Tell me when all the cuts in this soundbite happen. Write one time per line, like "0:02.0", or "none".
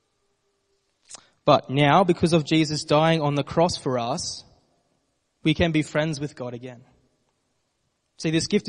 none